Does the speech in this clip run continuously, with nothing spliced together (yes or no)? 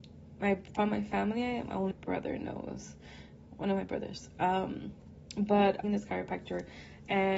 no